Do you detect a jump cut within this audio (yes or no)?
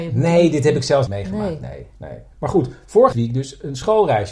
yes